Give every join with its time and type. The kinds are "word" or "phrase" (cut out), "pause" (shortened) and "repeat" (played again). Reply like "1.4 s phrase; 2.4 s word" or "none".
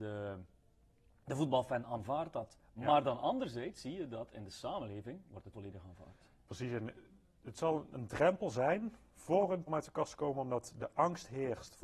5.5 s word; 9.7 s word